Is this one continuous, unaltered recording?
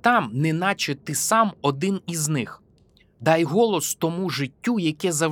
yes; 0 cuts

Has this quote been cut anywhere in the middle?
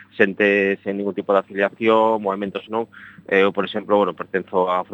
yes; 1 cut; at 2.7 s

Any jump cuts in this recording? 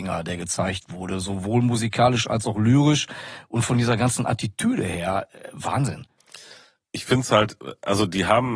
no; 0 cuts

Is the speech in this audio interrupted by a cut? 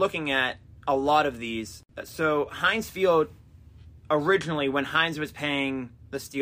yes; 1 cut; at 4.0 s

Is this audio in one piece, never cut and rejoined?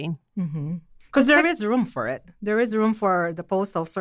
yes; 0 cuts

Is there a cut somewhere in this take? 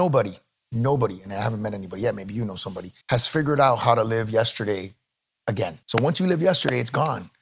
yes; 2 cuts; at 3.0 s, 5.8 s

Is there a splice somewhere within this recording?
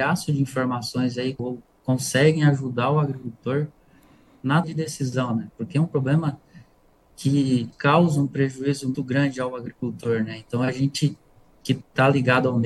yes; 4 cuts; at 1.4 s, 4.6 s, 7.7 s, 8.9 s

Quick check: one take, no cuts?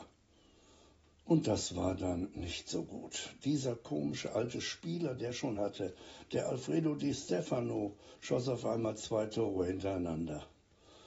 no; 1 cut; at 5.6 s

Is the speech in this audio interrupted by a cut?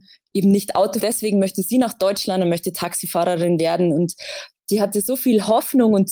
yes; 1 cut; at 1.0 s

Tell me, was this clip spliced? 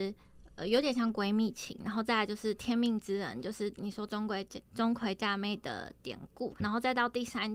yes; 1 cut; at 6.6 s

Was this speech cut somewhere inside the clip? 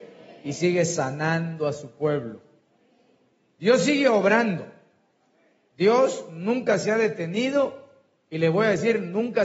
no; 0 cuts

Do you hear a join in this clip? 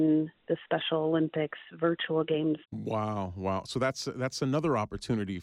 yes; 1 cut; at 2.6 s

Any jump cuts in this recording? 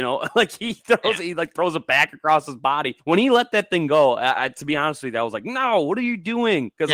yes; 1 cut; at 3.0 s

